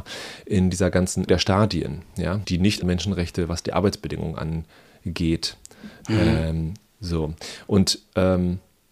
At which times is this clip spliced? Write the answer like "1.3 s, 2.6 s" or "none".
1.3 s, 2.4 s, 2.8 s